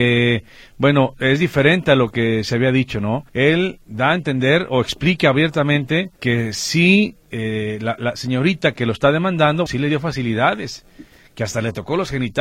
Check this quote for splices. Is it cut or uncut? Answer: cut